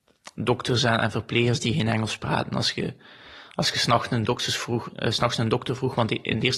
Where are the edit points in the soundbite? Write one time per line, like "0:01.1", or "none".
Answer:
none